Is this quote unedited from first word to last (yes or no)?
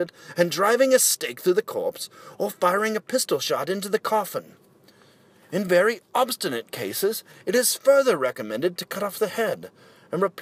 yes